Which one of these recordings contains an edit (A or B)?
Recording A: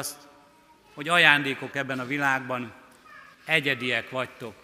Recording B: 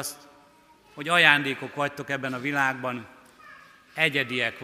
A